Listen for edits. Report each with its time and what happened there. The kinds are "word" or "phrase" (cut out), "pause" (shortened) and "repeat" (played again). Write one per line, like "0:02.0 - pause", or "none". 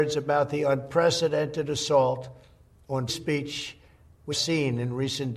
0:03.1 - word
0:04.3 - word